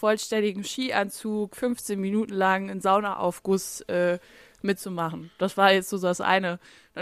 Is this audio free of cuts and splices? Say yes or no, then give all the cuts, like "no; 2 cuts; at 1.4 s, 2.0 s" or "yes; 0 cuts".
yes; 0 cuts